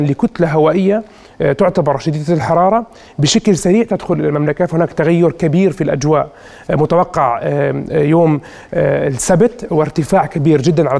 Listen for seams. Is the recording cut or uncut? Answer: uncut